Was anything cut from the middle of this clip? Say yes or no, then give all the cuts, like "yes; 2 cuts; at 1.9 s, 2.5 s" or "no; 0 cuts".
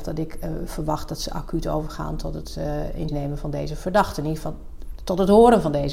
yes; 1 cut; at 3.1 s